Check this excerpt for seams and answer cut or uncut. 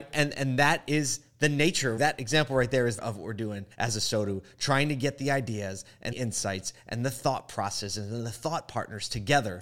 cut